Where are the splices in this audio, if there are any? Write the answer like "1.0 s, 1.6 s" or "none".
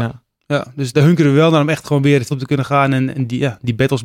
0.9 s, 2.3 s, 3.1 s